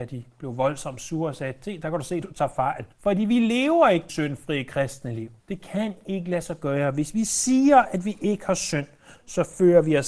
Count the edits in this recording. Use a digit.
3